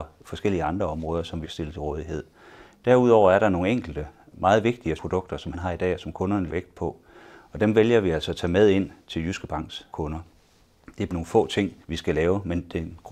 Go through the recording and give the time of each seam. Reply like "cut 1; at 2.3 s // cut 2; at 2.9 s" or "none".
cut 1; at 1.4 s // cut 2; at 5.0 s // cut 3; at 5.5 s // cut 4; at 6.5 s // cut 5; at 9.9 s // cut 6; at 11.1 s // cut 7; at 11.8 s